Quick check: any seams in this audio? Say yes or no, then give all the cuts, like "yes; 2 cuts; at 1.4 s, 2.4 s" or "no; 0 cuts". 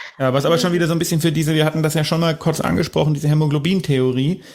no; 0 cuts